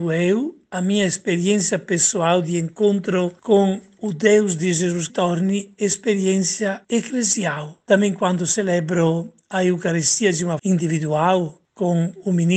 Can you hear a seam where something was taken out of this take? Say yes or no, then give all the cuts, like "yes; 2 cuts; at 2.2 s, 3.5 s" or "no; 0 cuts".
yes; 3 cuts; at 5.1 s, 6.8 s, 10.6 s